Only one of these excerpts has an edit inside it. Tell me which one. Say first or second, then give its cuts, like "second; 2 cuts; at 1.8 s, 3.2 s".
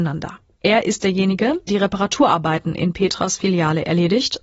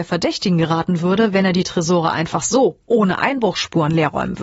first; 1 cut; at 1.7 s